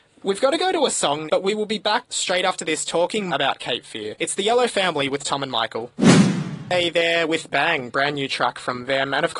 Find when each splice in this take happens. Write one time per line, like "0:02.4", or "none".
0:01.3
0:03.3
0:07.5